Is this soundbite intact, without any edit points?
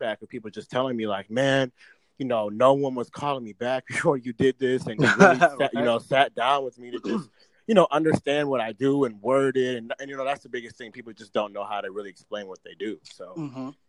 yes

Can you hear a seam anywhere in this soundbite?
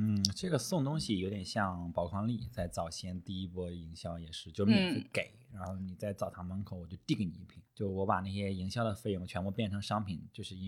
yes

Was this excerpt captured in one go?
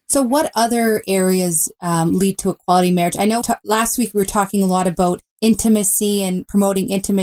no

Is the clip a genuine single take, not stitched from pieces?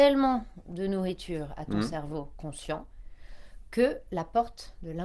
yes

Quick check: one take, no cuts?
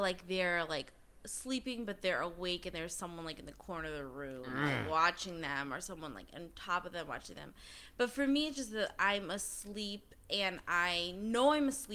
yes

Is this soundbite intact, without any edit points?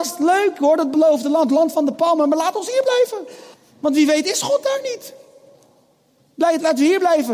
no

